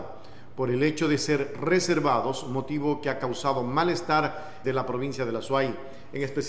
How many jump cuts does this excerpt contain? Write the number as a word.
one